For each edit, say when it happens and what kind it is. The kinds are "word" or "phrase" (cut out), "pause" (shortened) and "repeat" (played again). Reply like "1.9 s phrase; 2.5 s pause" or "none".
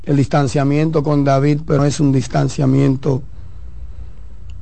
1.8 s word